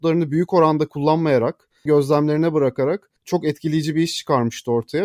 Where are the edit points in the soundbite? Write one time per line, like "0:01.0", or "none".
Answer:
0:01.9
0:03.2